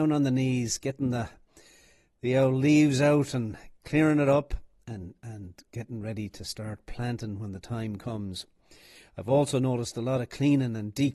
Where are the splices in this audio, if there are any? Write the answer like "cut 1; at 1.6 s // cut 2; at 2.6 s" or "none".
none